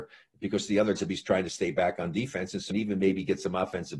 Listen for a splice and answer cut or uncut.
cut